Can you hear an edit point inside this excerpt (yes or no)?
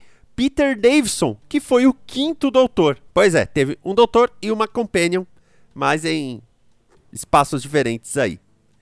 yes